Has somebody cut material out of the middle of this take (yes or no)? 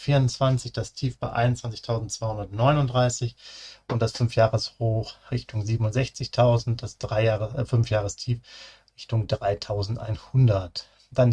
no